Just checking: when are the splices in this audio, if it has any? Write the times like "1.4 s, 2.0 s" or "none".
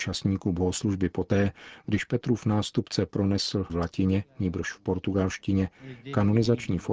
3.7 s